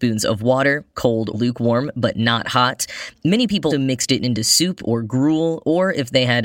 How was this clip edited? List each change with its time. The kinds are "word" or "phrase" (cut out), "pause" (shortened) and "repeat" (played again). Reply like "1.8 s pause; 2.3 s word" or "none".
1.3 s word; 3.7 s word